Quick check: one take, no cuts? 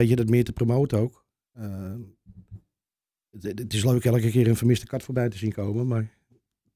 yes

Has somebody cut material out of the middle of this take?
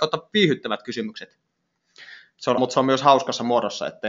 yes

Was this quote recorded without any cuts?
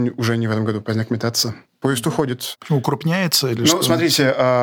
yes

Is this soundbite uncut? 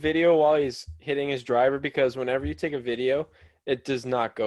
yes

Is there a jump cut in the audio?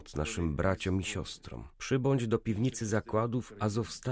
yes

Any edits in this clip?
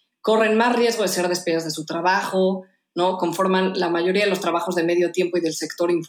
no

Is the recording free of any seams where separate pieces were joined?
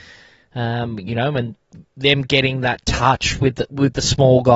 yes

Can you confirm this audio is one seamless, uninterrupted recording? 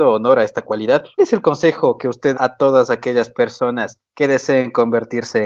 no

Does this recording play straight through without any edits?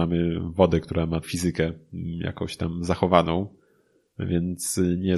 no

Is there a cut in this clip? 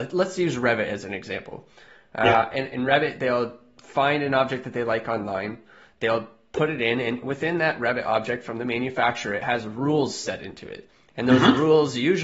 no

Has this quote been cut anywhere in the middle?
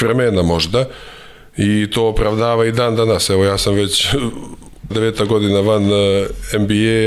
yes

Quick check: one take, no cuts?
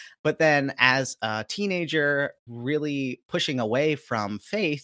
no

